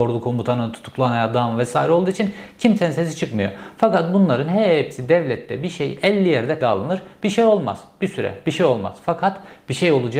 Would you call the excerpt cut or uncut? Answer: cut